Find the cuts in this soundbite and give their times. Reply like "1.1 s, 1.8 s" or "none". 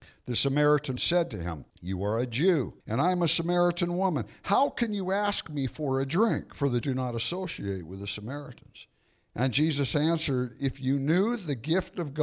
1.0 s, 1.7 s, 2.8 s, 6.8 s, 9.1 s